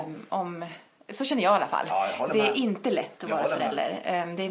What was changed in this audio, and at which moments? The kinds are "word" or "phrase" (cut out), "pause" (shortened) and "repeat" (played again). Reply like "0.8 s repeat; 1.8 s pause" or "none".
none